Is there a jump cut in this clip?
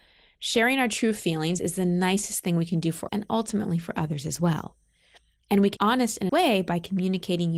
yes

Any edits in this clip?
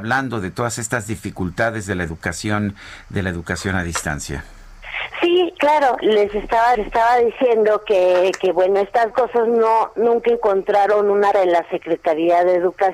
yes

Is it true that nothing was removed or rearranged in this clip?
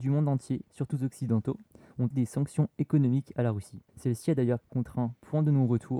no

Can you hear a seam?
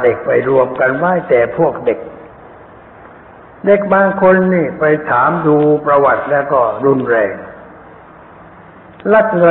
no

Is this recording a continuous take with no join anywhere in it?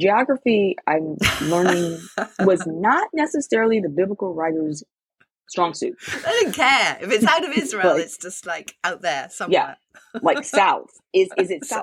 yes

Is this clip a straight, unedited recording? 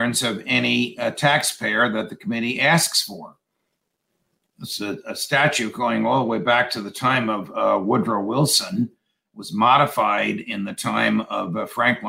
yes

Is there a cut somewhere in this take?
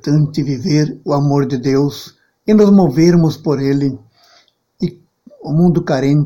no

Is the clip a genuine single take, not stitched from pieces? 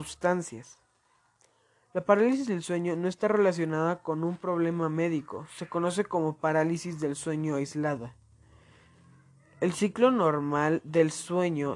yes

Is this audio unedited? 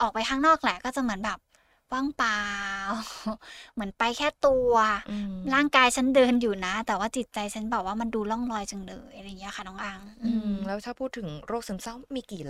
yes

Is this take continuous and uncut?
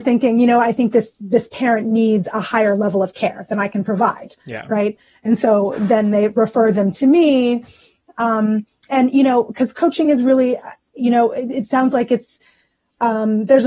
yes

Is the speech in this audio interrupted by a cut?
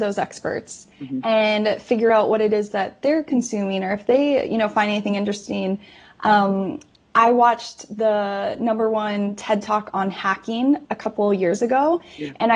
no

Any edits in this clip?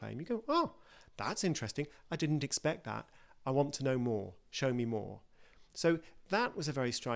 no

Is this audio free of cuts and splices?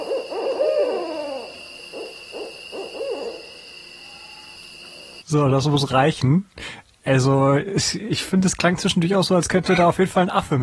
yes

